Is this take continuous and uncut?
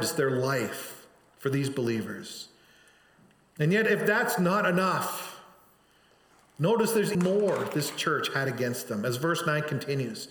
no; 1 cut; at 7.1 s

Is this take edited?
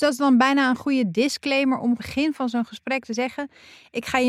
yes; 1 cut; at 2.0 s

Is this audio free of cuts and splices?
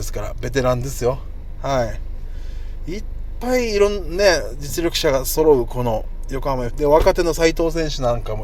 no; 1 cut; at 6.7 s

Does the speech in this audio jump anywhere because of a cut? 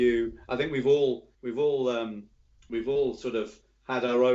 yes; 1 cut; at 1.3 s

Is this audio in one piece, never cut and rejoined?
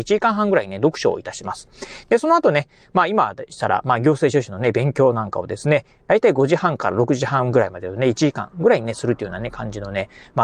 yes; 0 cuts

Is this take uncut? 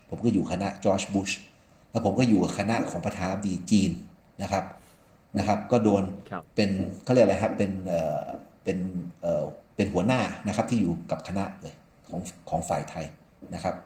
yes; 0 cuts

